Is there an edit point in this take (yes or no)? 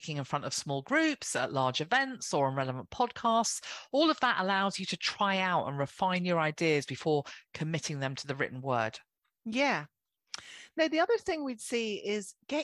no